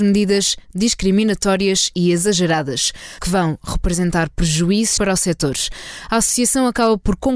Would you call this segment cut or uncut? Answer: cut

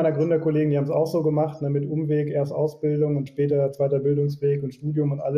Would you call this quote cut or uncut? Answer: cut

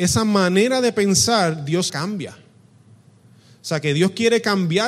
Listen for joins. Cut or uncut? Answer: cut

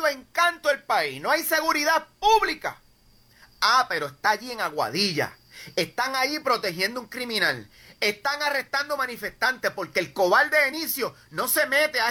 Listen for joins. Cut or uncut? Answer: uncut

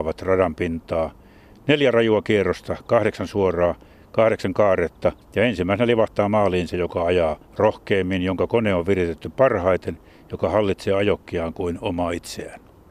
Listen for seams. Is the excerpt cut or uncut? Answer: uncut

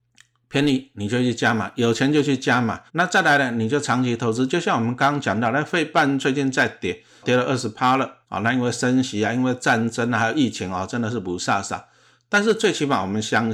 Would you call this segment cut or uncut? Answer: cut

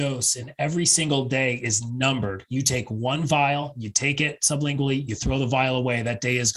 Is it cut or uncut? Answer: uncut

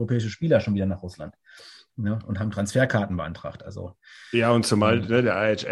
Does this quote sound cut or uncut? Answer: uncut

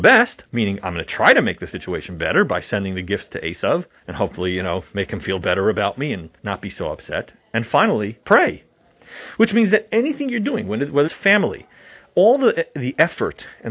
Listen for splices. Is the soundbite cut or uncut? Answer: cut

